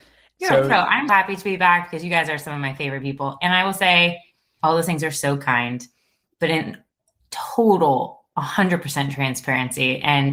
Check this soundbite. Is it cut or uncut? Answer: cut